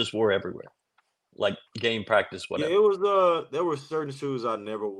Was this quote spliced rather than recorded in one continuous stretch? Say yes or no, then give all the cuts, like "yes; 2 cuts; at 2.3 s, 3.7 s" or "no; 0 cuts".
yes; 1 cut; at 1.7 s